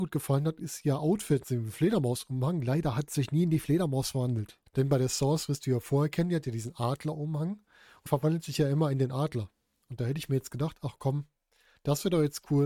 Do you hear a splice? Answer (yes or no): yes